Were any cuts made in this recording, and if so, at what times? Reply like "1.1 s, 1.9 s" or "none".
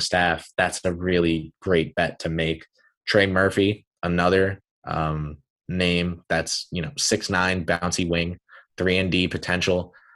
none